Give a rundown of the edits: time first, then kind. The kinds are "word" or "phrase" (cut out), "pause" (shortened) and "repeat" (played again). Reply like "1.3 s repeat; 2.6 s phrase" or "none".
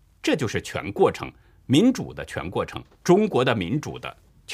2.9 s pause